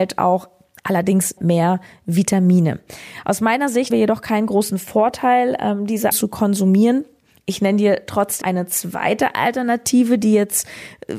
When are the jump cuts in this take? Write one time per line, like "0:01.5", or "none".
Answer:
0:01.4
0:03.9
0:06.1
0:08.4

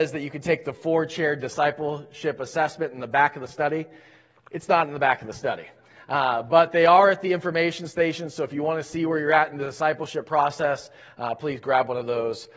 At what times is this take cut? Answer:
none

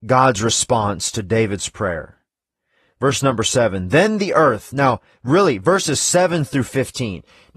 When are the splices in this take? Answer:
none

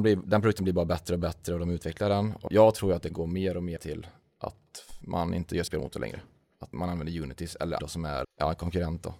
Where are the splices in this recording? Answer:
0:02.5
0:03.1
0:03.8
0:05.7
0:06.7
0:07.8
0:08.2

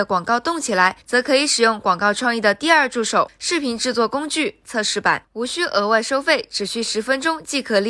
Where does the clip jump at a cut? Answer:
0:01.0

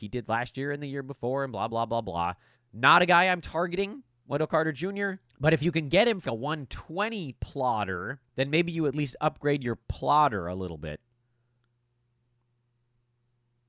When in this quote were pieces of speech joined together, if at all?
0:01.7
0:02.5
0:05.3
0:06.2
0:07.4
0:08.3

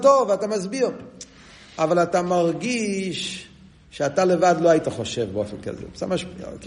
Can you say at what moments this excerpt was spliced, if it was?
none

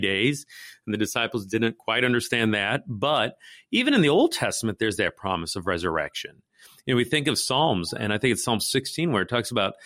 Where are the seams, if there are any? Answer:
none

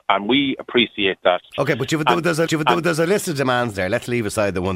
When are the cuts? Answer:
0:01.5
0:02.5

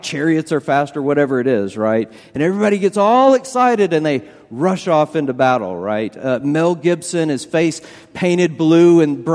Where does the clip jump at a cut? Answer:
none

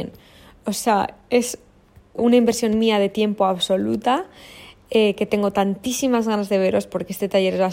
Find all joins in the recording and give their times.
0:02.2

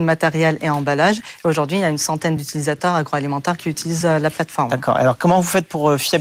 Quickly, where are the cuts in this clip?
none

